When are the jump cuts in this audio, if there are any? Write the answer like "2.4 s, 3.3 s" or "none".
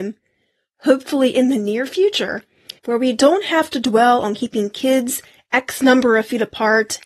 2.8 s